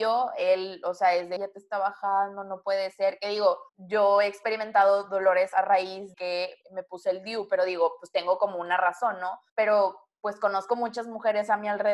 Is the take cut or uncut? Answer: cut